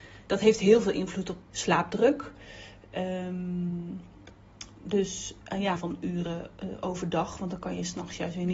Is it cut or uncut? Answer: cut